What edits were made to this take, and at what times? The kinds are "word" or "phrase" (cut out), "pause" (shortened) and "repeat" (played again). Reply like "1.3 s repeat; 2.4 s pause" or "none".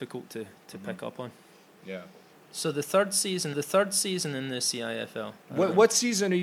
2.3 s pause; 3.5 s repeat; 5.4 s pause

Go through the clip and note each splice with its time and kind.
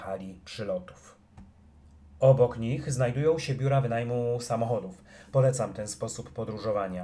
1.6 s pause

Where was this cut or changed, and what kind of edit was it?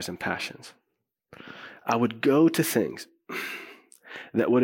none

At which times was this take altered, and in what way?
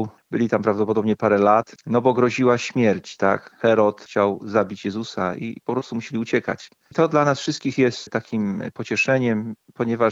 none

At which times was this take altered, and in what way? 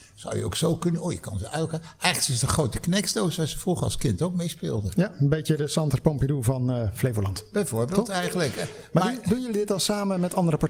none

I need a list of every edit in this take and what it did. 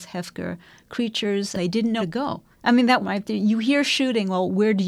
2.0 s word; 2.5 s pause; 3.0 s phrase

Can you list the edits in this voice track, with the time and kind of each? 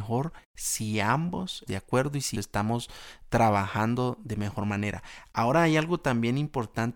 1.7 s word; 2.3 s word

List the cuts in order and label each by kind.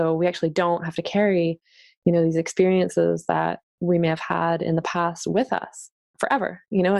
none

